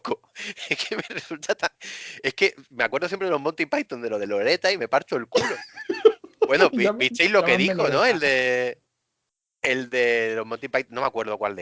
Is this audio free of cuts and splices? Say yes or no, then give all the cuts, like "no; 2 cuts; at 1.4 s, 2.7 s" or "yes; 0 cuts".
yes; 0 cuts